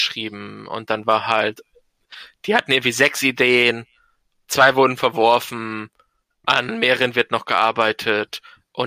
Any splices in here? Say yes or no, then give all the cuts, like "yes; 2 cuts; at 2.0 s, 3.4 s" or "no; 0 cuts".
no; 0 cuts